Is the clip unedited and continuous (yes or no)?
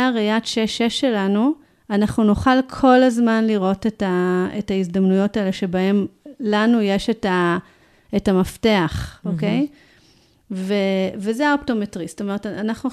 no